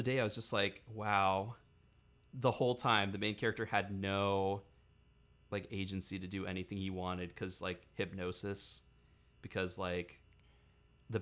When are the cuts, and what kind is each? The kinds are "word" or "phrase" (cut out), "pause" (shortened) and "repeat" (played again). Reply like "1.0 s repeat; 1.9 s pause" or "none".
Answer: none